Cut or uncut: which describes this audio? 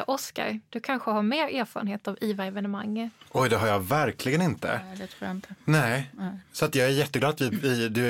uncut